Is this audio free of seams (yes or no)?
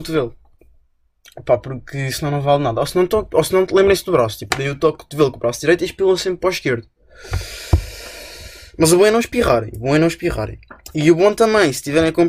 yes